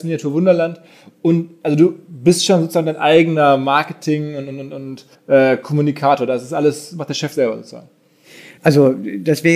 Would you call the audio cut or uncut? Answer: cut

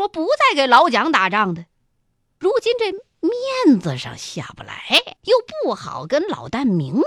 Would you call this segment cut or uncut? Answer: cut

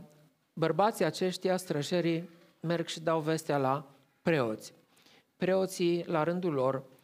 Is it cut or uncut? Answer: uncut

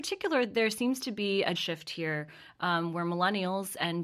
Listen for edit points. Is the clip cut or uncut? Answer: cut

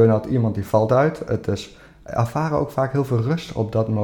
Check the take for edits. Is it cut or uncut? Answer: uncut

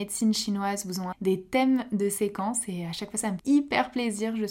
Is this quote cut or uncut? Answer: cut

